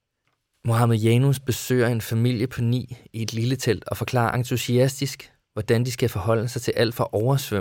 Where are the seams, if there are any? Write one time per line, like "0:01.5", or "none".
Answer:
none